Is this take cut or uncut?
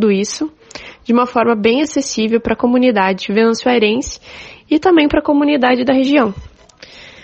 uncut